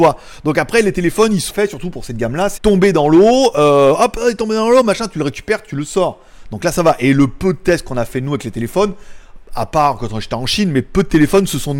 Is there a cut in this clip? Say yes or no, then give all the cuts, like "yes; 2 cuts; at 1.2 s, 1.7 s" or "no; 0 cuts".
yes; 2 cuts; at 1.5 s, 2.6 s